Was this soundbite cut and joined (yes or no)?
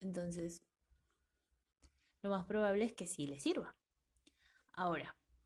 no